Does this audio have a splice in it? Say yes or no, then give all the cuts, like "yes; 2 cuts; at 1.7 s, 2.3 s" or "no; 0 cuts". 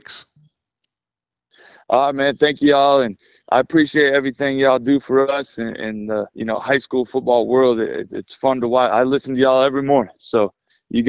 yes; 1 cut; at 6.3 s